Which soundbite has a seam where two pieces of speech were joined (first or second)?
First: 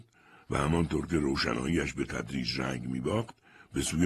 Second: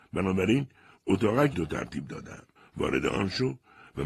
second